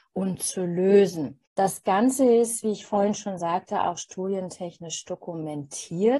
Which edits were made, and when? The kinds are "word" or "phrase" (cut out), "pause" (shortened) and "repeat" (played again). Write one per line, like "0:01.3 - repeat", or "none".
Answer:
0:01.5 - pause